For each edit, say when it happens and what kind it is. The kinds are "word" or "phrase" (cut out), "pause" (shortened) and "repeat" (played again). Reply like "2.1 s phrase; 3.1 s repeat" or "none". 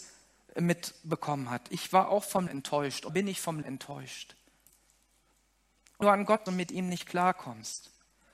2.5 s word; 3.1 s word; 3.6 s word; 6.0 s word; 6.5 s word